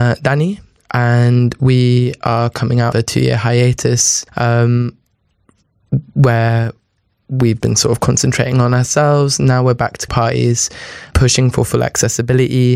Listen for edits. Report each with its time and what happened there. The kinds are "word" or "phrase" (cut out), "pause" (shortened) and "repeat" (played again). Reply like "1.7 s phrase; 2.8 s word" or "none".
2.2 s word; 2.9 s word; 4.3 s pause; 7.6 s word; 10.1 s word; 11.1 s word